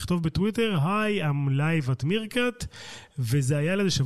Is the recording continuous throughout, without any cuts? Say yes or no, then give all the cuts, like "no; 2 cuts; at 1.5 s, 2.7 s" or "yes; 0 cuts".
yes; 0 cuts